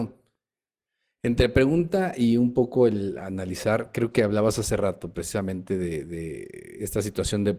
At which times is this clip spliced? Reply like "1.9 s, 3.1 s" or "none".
4.1 s